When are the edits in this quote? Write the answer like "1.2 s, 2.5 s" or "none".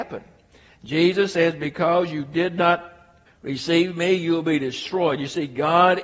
3.3 s